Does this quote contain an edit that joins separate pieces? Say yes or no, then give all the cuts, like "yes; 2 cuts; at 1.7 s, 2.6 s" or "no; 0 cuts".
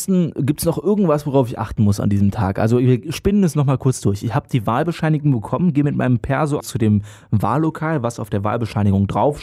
yes; 1 cut; at 6.6 s